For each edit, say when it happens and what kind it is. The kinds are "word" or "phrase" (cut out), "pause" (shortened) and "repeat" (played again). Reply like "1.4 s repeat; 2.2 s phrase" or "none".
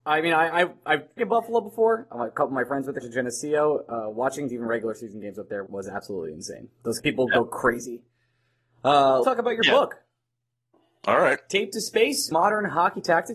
1.2 s word; 3.0 s word; 4.5 s word; 5.7 s word; 7.0 s word; 9.2 s word; 12.3 s word